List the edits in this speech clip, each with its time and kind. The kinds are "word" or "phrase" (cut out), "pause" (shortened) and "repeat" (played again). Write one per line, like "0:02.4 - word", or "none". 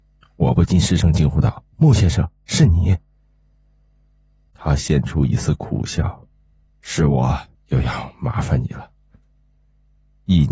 0:01.7 - pause
0:07.5 - pause